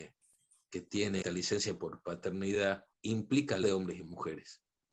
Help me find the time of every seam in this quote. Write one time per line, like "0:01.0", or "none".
0:01.2
0:02.9
0:03.6